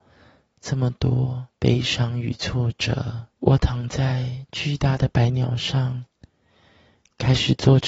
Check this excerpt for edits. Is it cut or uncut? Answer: cut